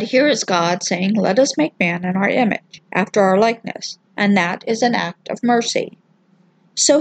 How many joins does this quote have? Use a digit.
2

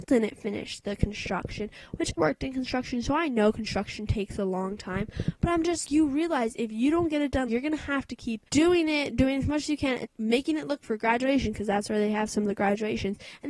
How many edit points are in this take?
6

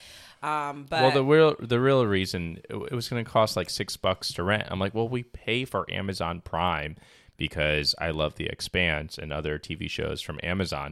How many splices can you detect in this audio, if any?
0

